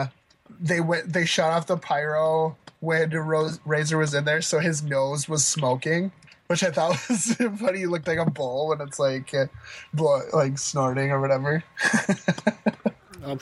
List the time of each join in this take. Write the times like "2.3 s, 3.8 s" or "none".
6.3 s